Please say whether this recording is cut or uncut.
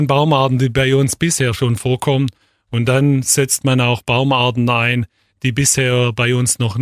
uncut